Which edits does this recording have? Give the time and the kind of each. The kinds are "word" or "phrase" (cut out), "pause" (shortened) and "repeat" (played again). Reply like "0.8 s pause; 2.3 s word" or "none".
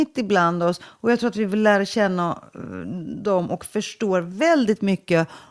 none